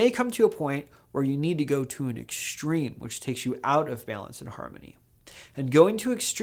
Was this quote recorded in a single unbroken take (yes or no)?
yes